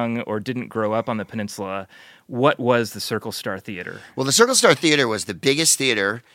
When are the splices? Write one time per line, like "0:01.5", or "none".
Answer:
none